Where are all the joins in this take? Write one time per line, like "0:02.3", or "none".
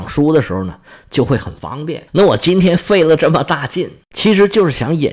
0:02.1